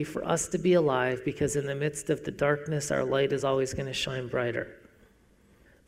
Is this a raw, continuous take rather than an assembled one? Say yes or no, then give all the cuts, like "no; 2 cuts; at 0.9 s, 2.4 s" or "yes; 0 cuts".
yes; 0 cuts